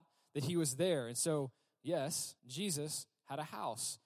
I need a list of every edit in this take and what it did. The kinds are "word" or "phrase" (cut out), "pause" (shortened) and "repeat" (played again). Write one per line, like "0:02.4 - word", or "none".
0:02.4 - pause